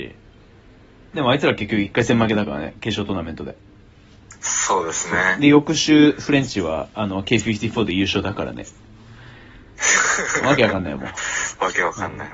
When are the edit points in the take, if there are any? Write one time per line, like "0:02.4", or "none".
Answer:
0:01.1

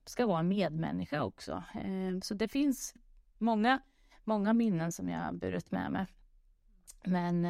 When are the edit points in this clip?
none

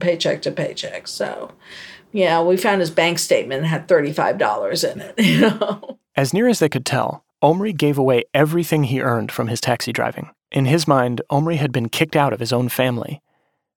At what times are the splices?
0:06.1
0:07.3
0:10.4

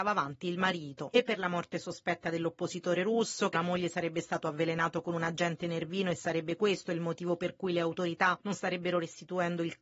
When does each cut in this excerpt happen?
0:03.5

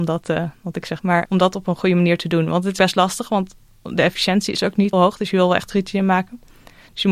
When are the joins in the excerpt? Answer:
0:01.0
0:02.8
0:04.9
0:05.7

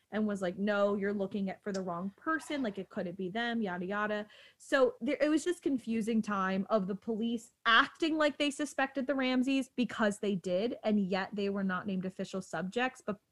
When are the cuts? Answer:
0:05.0
0:05.4
0:07.6

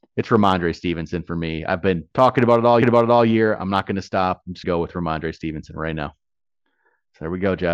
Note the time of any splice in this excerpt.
0:02.1
0:02.8
0:04.6

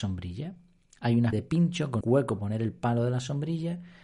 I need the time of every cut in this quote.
0:01.3
0:02.0
0:02.4

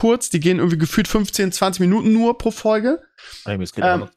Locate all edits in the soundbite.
none

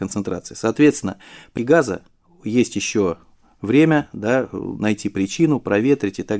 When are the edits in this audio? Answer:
0:01.6

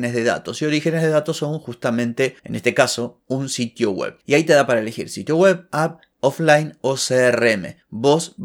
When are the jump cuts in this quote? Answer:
0:02.4
0:04.2

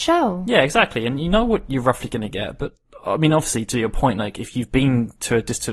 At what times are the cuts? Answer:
none

